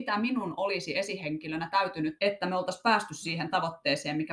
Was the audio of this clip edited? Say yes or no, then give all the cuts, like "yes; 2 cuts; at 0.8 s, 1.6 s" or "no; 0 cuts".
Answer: yes; 1 cut; at 2.2 s